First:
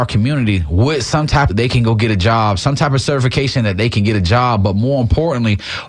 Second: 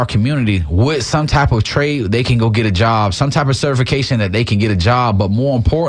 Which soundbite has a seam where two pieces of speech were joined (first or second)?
first